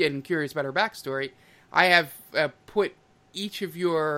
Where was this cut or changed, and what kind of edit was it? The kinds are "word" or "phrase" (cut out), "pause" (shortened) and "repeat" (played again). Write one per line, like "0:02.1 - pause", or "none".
none